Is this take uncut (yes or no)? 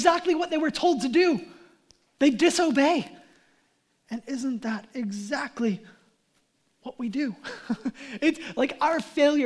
yes